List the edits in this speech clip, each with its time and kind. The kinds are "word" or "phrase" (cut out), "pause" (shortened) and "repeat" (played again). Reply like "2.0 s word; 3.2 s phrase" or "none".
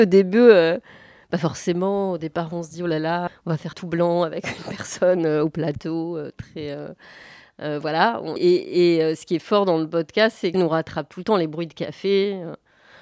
3.3 s word; 3.7 s word; 8.4 s word; 10.5 s phrase

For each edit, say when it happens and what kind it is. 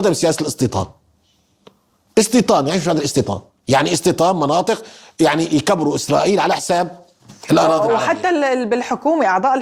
none

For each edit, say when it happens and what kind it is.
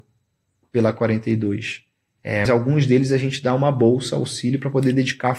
2.5 s word

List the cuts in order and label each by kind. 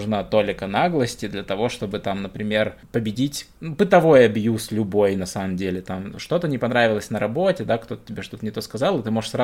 3.6 s word

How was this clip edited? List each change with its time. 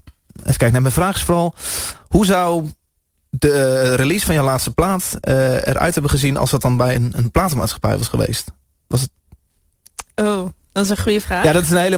none

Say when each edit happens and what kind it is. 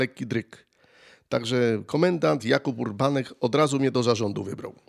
none

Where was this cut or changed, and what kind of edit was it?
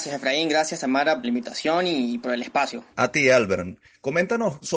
1.2 s phrase; 2.9 s pause

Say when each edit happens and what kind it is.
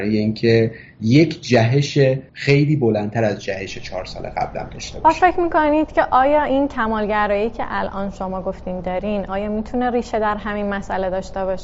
2.3 s pause

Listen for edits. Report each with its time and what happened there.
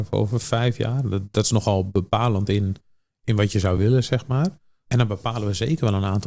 none

